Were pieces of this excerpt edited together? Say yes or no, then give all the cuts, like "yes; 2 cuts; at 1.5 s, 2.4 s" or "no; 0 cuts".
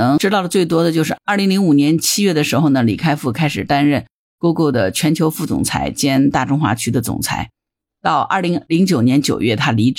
no; 0 cuts